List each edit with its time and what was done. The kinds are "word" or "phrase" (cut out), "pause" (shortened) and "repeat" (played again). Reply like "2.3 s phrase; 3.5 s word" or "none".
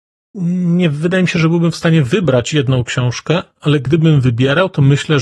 none